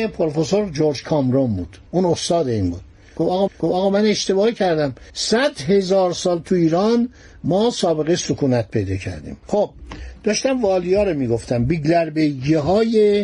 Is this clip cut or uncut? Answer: cut